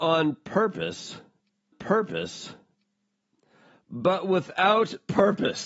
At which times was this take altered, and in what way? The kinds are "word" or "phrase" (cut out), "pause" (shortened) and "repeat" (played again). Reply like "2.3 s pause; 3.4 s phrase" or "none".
1.7 s repeat